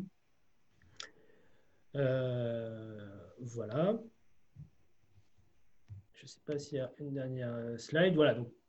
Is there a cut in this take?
yes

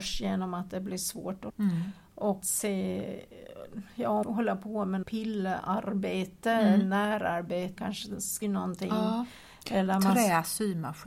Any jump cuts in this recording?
yes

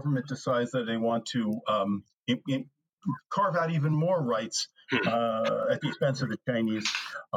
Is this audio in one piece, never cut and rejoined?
yes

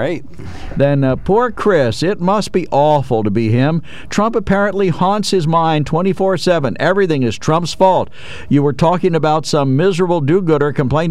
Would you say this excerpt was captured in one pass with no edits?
yes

